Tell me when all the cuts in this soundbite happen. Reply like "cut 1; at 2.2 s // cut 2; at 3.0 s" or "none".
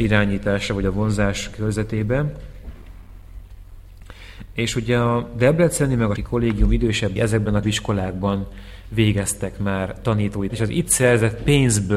cut 1; at 6.2 s // cut 2; at 7.2 s // cut 3; at 7.6 s // cut 4; at 10.5 s